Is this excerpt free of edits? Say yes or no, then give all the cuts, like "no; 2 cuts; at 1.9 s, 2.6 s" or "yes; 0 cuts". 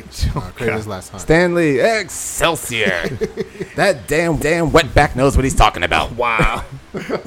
no; 1 cut; at 4.4 s